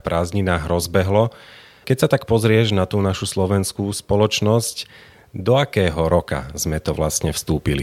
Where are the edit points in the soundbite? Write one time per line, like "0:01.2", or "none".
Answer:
none

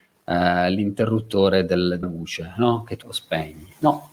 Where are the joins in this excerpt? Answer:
0:02.0
0:03.0

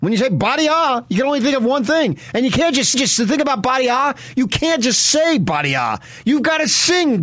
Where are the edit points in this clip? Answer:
0:02.9

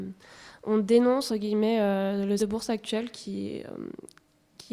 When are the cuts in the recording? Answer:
0:01.3
0:02.4

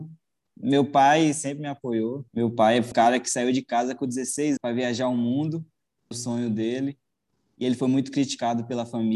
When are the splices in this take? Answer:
0:02.3
0:02.9
0:04.6
0:06.1

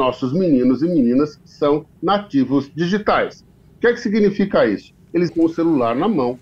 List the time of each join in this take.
0:05.3

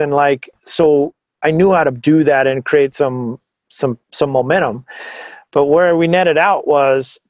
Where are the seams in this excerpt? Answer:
0:04.0

